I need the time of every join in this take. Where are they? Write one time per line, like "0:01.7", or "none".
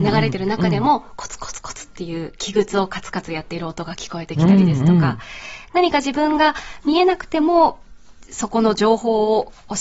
none

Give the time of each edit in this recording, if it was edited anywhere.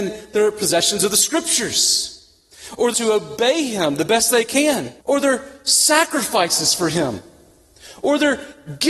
0:02.9
0:05.0

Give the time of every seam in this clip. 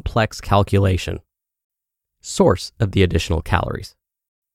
none

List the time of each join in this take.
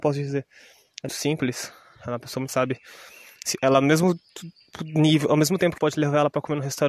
0:01.1
0:02.5
0:05.8

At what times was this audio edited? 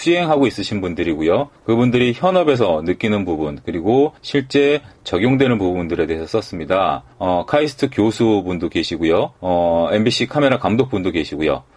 0:01.6
0:04.2
0:07.1
0:09.4

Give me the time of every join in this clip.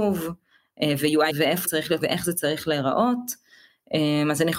0:01.3
0:01.6
0:02.0

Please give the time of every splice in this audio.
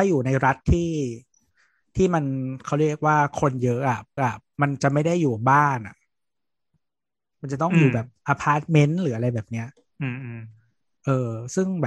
0:04.2

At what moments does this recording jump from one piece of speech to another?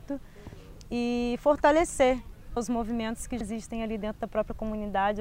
0:02.6
0:03.4

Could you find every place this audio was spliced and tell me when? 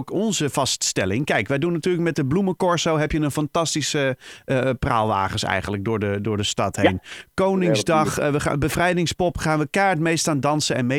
none

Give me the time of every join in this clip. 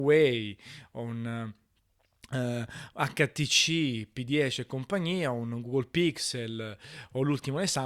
none

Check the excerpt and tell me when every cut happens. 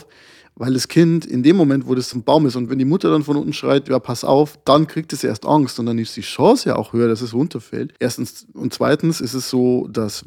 0:02.1
0:02.7
0:08.0

